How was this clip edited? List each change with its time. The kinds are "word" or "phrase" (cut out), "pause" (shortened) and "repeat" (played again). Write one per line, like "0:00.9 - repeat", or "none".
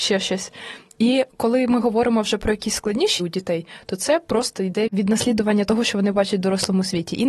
0:03.2 - phrase